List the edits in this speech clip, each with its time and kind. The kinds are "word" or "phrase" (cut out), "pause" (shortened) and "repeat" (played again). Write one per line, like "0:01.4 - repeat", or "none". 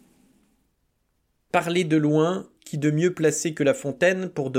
0:02.6 - pause